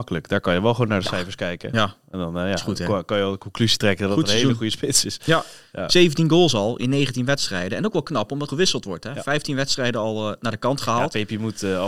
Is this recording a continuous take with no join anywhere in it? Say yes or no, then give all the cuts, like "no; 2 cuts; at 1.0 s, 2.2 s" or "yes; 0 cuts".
no; 1 cut; at 8.5 s